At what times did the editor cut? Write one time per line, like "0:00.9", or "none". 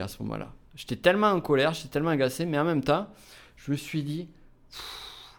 none